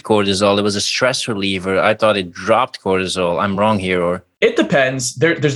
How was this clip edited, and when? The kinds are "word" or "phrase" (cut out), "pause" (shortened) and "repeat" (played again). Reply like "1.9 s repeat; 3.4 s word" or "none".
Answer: none